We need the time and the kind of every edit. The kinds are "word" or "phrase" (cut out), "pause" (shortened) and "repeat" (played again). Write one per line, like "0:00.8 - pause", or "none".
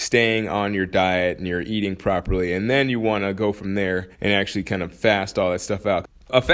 0:04.1 - pause